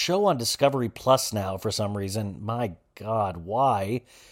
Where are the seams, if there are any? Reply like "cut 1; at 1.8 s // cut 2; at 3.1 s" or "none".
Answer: none